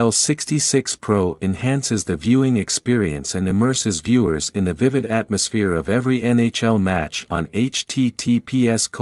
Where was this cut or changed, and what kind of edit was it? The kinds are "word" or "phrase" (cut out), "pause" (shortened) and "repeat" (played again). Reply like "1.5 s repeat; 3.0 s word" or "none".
none